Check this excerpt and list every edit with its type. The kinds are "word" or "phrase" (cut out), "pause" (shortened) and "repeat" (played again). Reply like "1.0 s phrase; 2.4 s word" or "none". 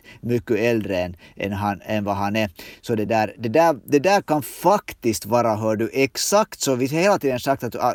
none